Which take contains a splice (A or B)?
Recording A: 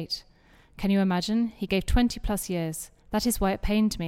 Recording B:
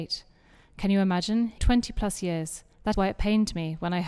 B